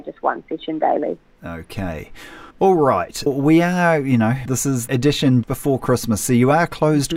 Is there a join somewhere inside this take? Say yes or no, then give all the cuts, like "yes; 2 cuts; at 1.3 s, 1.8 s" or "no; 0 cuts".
yes; 5 cuts; at 2.5 s, 3.3 s, 4.5 s, 4.9 s, 5.4 s